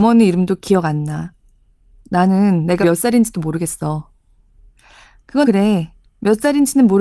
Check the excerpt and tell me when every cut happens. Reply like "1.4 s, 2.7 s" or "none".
2.8 s, 5.4 s

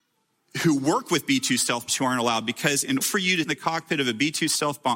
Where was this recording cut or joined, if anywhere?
1.9 s, 3.0 s, 3.4 s

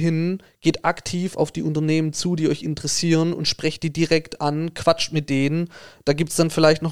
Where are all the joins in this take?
none

